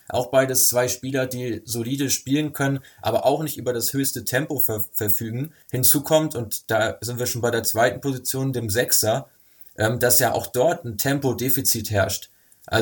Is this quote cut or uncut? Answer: cut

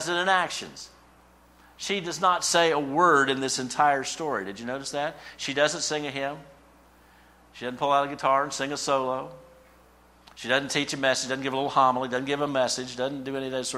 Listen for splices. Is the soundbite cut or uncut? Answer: uncut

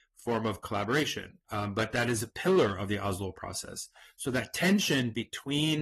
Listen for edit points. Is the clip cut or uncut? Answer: cut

